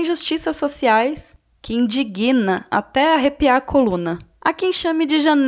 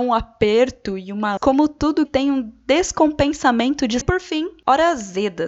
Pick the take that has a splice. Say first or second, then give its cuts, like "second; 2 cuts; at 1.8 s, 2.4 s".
second; 3 cuts; at 1.4 s, 2.0 s, 4.0 s